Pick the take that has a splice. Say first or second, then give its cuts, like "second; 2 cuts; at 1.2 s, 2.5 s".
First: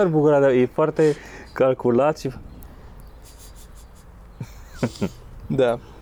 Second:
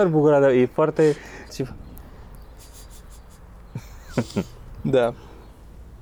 second; 1 cut; at 1.5 s